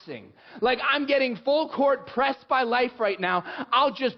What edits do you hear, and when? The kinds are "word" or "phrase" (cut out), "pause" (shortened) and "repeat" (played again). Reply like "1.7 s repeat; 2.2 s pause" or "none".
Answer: none